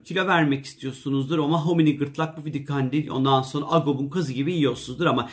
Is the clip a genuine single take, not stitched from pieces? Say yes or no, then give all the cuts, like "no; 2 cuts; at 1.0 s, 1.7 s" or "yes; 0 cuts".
yes; 0 cuts